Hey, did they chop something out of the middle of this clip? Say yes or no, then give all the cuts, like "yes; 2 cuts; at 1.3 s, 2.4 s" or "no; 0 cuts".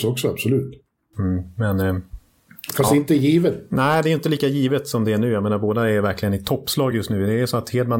no; 0 cuts